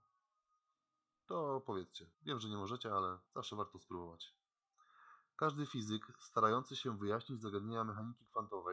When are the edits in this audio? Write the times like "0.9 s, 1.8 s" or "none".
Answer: 2.1 s, 3.3 s